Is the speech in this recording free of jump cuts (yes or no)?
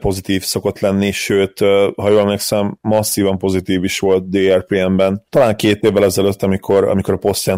yes